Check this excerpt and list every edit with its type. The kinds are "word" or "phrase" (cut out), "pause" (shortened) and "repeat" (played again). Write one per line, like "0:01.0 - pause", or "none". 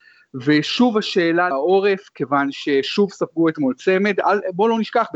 0:01.5 - word